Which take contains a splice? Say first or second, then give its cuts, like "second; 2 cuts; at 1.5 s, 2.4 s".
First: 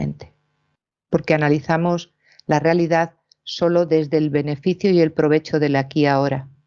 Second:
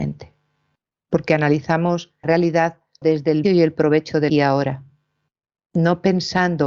second; 4 cuts; at 2.2 s, 3.0 s, 3.4 s, 4.3 s